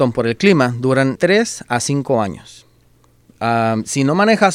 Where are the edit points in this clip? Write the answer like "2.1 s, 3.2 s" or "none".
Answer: 1.1 s